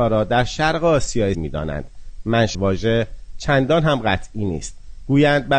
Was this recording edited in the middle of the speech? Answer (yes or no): yes